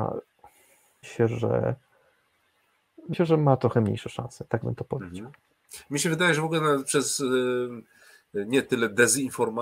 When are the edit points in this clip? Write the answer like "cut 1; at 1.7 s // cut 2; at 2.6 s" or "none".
cut 1; at 1.0 s // cut 2; at 3.1 s